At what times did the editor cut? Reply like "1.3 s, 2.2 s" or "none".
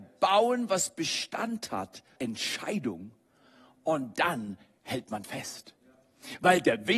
2.2 s, 5.2 s